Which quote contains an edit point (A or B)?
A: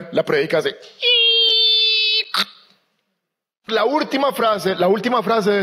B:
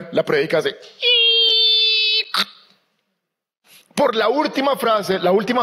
A